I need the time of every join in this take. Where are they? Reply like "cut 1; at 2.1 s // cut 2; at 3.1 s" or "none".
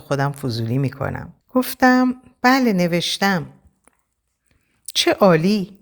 cut 1; at 1.4 s

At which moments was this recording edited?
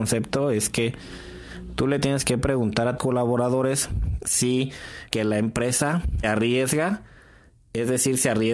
cut 1; at 3.0 s // cut 2; at 5.1 s // cut 3; at 6.2 s

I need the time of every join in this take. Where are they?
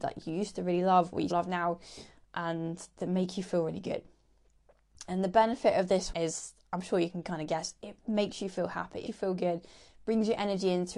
cut 1; at 1.3 s // cut 2; at 6.1 s // cut 3; at 8.0 s // cut 4; at 9.1 s

